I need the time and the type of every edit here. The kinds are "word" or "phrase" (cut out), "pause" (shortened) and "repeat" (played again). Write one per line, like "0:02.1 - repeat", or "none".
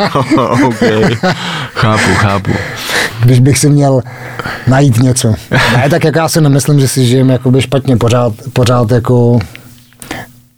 none